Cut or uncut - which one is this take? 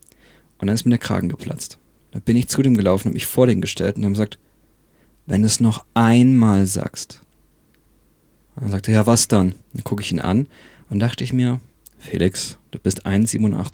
cut